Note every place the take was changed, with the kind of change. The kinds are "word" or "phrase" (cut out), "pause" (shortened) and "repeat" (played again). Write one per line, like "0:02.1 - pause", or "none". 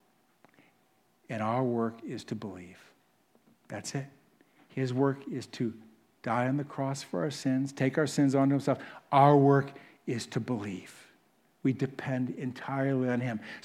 none